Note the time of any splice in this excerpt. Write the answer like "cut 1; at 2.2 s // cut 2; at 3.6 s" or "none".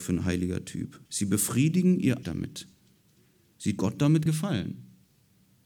cut 1; at 1.1 s // cut 2; at 2.2 s // cut 3; at 3.8 s // cut 4; at 4.3 s